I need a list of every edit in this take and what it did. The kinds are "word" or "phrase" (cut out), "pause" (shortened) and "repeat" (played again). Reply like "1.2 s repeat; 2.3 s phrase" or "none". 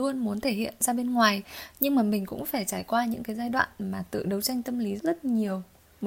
5.0 s word